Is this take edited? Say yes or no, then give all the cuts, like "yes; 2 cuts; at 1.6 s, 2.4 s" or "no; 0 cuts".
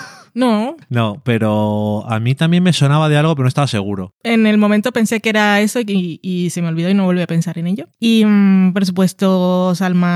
no; 0 cuts